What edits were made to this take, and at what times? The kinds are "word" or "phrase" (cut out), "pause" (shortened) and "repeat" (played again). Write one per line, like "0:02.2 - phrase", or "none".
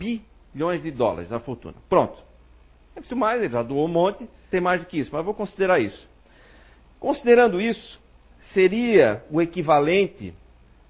0:03.1 - word
0:04.5 - phrase